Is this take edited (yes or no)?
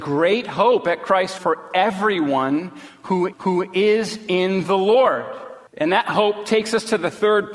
yes